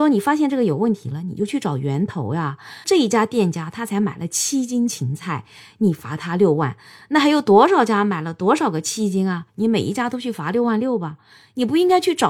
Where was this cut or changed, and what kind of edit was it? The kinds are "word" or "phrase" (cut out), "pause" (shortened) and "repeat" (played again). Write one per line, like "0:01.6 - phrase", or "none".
none